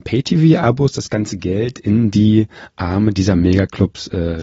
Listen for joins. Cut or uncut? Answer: uncut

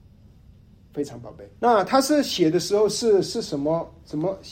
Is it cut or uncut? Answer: cut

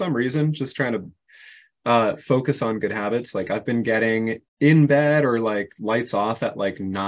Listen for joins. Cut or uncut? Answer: cut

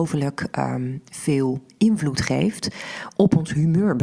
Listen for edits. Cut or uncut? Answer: uncut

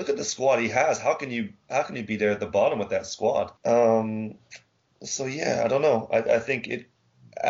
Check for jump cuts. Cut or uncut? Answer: cut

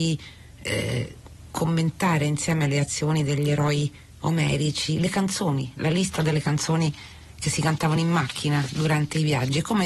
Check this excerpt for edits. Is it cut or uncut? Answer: uncut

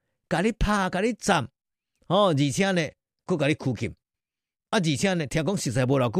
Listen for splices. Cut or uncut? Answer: cut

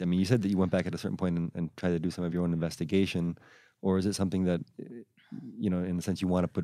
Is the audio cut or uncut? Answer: uncut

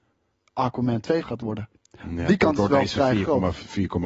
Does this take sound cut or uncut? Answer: cut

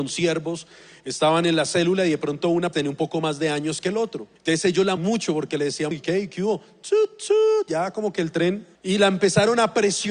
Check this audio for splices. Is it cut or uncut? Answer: cut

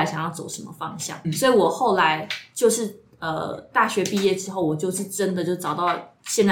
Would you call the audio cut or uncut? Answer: cut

